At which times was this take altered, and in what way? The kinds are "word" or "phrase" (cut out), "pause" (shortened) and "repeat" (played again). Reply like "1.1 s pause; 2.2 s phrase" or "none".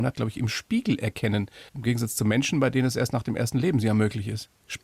1.7 s pause